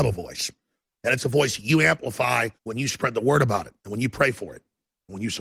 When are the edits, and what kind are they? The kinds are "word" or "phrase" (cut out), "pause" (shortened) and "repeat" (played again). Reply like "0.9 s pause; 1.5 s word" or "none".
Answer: 2.6 s pause; 3.8 s pause